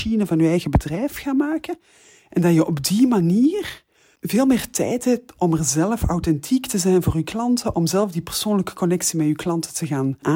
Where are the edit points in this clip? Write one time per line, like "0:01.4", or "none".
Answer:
none